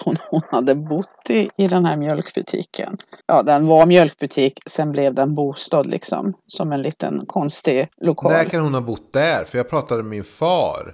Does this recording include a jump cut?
yes; 2 cuts; at 3.2 s, 7.9 s

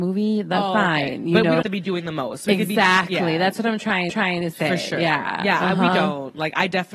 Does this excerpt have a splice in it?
yes; 2 cuts; at 1.6 s, 4.1 s

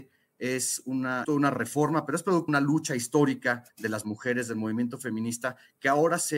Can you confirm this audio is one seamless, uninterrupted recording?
no; 3 cuts; at 1.2 s, 2.5 s, 3.7 s

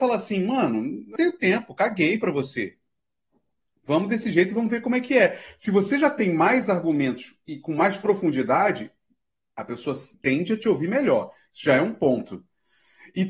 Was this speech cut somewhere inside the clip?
yes; 3 cuts; at 1.2 s, 7.5 s, 10.1 s

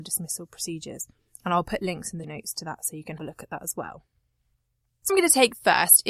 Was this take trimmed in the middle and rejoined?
yes; 3 cuts; at 2.2 s, 3.2 s, 5.1 s

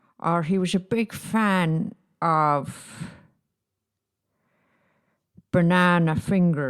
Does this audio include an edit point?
no; 0 cuts

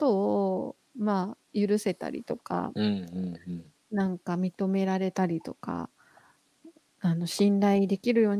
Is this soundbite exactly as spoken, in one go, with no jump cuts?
yes; 0 cuts

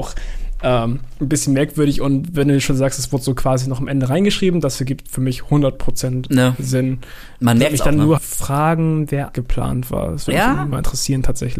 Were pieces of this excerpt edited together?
yes; 2 cuts; at 8.2 s, 9.3 s

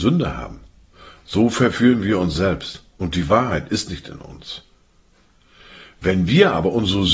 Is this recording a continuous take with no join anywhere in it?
yes; 0 cuts

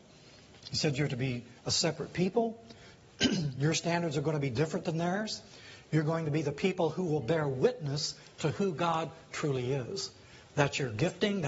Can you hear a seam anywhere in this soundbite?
yes; 1 cut; at 1.6 s

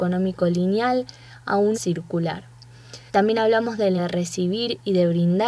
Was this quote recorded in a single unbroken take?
no; 3 cuts; at 1.7 s, 3.1 s, 4.0 s

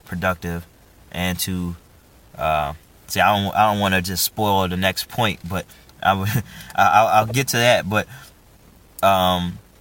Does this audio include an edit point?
no; 0 cuts

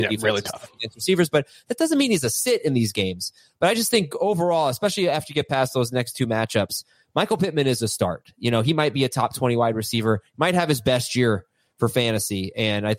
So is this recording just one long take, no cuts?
yes; 0 cuts

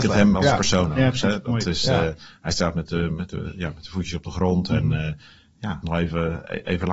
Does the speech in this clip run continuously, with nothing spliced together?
no; 1 cut; at 5.8 s

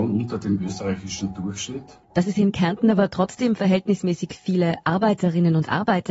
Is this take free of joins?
no; 1 cut; at 2.0 s

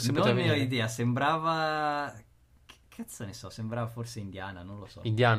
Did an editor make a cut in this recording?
no; 0 cuts

